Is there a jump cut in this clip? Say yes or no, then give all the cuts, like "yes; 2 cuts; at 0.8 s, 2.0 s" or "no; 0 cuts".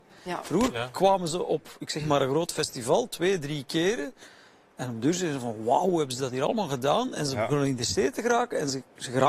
no; 0 cuts